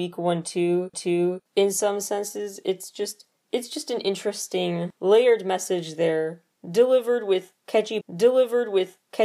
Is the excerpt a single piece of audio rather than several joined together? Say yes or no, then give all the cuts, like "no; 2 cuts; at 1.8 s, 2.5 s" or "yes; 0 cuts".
no; 2 cuts; at 0.9 s, 8.0 s